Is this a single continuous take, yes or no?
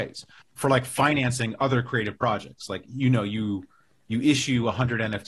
yes